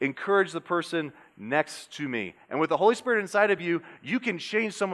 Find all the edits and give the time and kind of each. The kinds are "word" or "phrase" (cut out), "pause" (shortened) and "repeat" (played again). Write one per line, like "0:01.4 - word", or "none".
none